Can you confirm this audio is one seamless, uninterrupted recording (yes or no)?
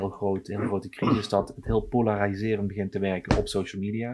yes